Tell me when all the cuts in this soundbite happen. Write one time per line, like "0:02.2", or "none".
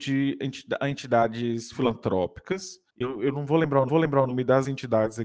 0:02.9
0:03.9

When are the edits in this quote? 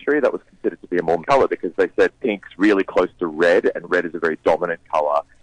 0:01.2
0:02.2

